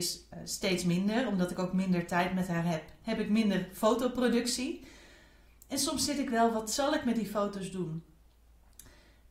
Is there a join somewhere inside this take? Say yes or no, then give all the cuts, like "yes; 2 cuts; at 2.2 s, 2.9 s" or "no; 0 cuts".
no; 0 cuts